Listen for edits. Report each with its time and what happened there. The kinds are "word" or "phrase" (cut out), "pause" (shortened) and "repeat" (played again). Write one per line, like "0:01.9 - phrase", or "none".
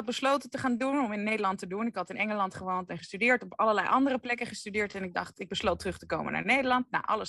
none